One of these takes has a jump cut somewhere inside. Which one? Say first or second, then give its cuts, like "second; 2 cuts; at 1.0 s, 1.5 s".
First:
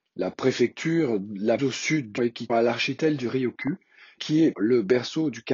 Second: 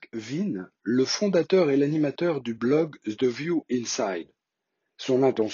first; 5 cuts; at 1.6 s, 2.2 s, 2.5 s, 4.2 s, 4.5 s